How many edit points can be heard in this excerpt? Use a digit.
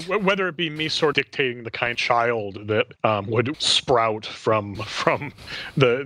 4